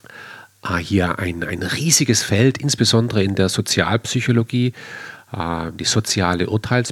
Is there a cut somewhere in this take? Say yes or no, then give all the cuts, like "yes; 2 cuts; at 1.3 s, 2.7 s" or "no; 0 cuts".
no; 0 cuts